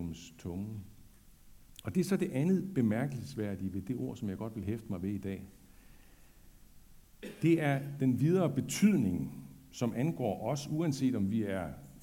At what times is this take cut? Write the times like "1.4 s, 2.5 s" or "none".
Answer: 8.0 s